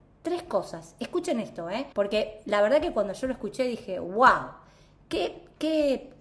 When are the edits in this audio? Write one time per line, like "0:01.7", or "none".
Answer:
0:01.9

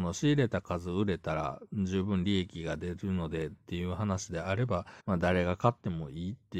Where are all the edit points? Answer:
0:05.0

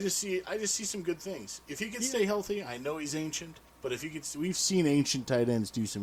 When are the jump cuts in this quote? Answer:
0:03.7

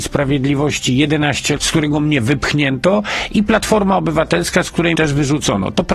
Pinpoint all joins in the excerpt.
0:01.6
0:05.0

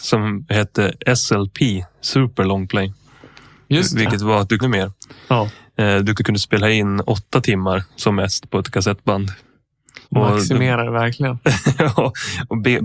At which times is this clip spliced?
0:04.6
0:06.2
0:10.0

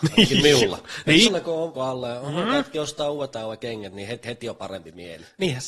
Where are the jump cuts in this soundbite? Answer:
0:01.3
0:01.7
0:03.3
0:04.2

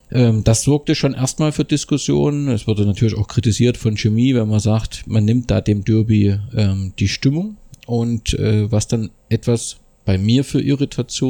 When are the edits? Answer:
none

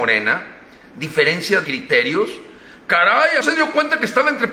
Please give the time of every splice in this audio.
0:01.6
0:03.4

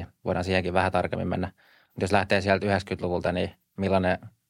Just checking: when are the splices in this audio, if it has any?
none

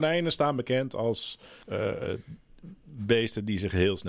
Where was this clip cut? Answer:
0:01.6

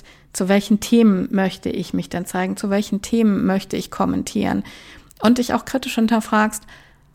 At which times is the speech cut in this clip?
none

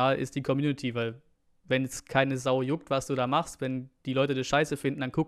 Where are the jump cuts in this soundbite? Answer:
none

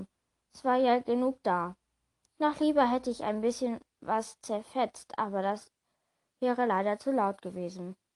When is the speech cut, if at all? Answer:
none

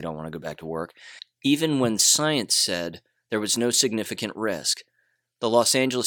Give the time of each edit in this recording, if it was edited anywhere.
none

